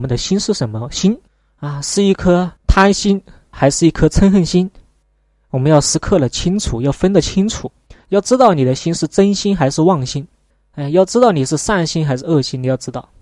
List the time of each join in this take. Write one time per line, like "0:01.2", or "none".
0:01.3
0:02.6
0:03.5
0:07.9
0:10.5

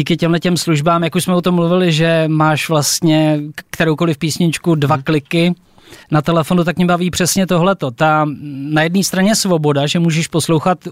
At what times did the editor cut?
0:06.0

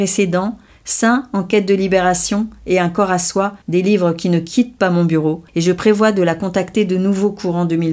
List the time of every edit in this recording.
0:03.6
0:05.5

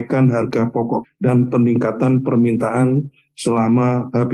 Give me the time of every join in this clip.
0:01.0

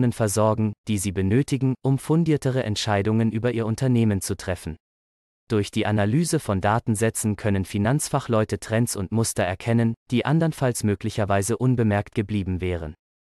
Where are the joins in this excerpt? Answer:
none

